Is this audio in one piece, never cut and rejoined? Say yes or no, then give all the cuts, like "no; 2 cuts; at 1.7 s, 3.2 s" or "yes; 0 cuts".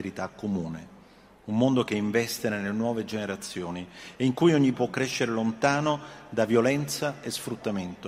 no; 1 cut; at 4.7 s